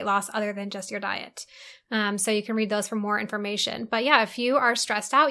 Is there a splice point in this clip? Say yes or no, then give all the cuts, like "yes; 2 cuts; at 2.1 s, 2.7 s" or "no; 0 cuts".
no; 0 cuts